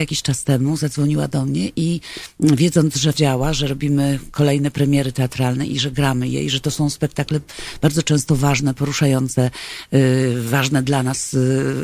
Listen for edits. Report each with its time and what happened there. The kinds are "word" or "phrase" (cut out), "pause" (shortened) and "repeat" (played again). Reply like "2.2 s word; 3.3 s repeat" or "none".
3.1 s word